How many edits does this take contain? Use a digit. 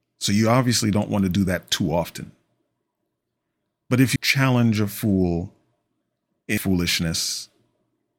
2